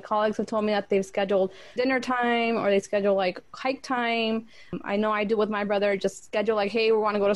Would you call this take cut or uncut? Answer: cut